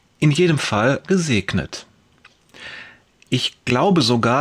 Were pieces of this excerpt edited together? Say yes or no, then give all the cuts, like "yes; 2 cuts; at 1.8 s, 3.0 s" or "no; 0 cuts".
yes; 1 cut; at 1.0 s